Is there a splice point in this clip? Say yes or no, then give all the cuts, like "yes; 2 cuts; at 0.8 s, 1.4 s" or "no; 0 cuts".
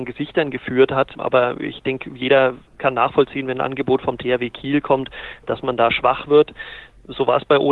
yes; 1 cut; at 2.7 s